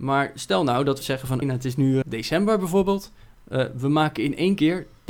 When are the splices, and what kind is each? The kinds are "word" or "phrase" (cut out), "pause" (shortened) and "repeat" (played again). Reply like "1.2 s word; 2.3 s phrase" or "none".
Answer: 1.0 s word; 1.4 s word; 2.0 s word